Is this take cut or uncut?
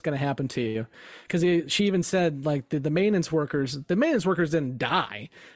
uncut